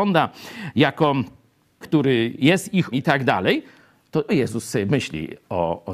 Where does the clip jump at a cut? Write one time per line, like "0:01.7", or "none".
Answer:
0:01.8
0:02.9
0:04.3